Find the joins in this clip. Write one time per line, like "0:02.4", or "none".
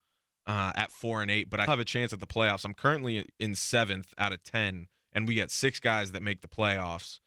0:01.7